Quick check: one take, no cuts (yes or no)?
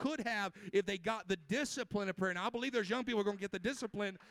yes